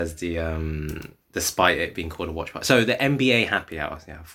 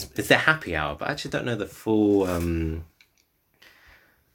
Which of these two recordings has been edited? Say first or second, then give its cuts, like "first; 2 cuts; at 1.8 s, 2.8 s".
first; 1 cut; at 1.2 s